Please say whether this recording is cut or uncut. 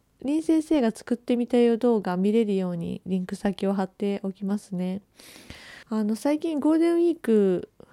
cut